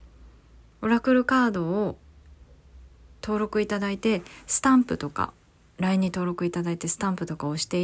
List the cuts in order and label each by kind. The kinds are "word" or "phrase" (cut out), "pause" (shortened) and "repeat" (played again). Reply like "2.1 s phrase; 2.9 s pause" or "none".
none